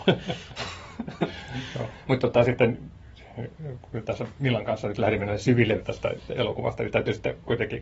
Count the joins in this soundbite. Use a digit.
1